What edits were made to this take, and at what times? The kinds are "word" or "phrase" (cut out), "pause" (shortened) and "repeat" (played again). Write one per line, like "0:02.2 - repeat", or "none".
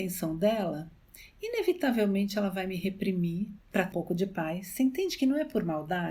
0:03.6 - pause
0:03.9 - word